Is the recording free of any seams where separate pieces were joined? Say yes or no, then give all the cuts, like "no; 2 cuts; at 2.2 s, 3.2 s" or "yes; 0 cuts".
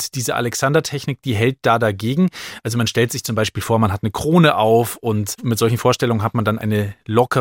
yes; 0 cuts